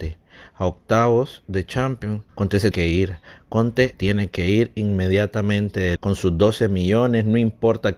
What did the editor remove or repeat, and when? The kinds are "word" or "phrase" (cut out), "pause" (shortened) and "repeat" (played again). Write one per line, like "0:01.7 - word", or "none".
0:02.3 - pause
0:02.7 - word
0:03.9 - word
0:06.0 - word